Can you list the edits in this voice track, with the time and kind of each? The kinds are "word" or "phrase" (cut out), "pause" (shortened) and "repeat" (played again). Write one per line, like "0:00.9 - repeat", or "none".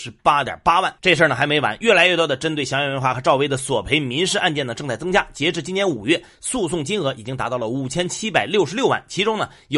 0:01.0 - pause